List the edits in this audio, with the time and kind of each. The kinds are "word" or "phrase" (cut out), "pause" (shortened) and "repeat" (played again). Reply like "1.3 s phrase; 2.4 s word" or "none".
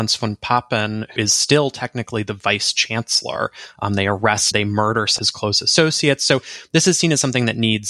1.2 s word; 4.5 s word; 5.2 s word